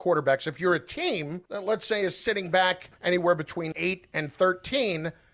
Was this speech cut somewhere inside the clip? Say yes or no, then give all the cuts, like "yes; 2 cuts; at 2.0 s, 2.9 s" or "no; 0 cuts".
yes; 3 cuts; at 1.5 s, 3.0 s, 3.7 s